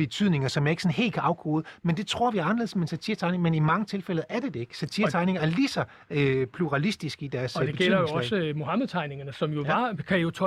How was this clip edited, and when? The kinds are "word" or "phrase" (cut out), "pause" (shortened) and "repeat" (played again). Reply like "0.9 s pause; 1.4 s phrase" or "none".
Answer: none